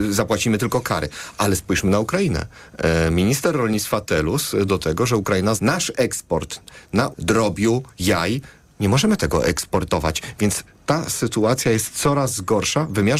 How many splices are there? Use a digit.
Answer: 3